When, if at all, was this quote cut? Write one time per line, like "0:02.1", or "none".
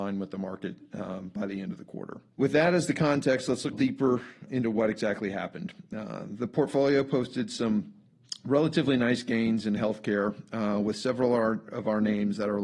0:02.3
0:03.7
0:04.5